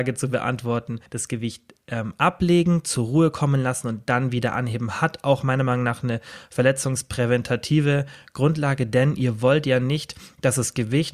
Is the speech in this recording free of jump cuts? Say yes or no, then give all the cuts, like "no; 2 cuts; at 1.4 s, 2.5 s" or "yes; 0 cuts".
no; 1 cut; at 1.1 s